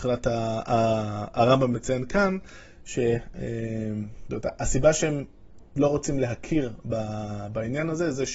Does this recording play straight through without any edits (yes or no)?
yes